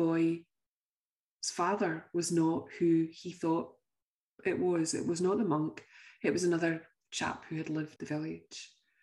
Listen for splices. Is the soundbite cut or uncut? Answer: cut